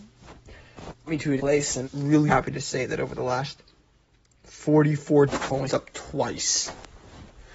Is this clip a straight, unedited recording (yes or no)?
no